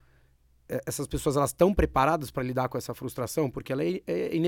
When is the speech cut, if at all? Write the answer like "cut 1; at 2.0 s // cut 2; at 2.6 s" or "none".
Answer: none

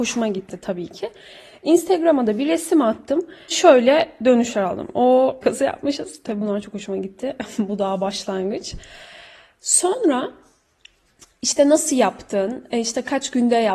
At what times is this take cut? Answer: cut 1; at 3.5 s // cut 2; at 5.4 s

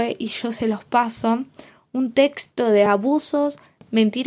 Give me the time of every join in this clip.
none

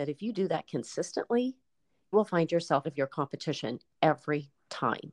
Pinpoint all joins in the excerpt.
cut 1; at 2.1 s // cut 2; at 2.8 s

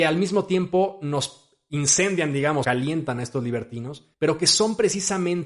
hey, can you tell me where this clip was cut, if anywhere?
cut 1; at 2.6 s // cut 2; at 4.1 s

